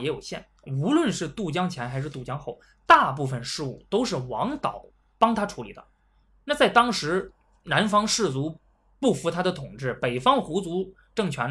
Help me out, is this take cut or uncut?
uncut